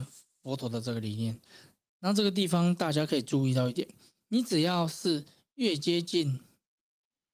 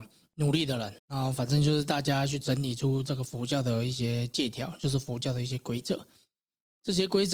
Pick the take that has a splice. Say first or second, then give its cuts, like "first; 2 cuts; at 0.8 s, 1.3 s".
second; 1 cut; at 1.0 s